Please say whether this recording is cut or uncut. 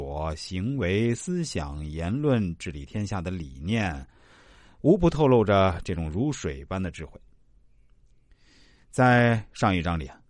uncut